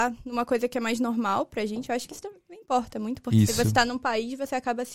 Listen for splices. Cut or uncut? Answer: cut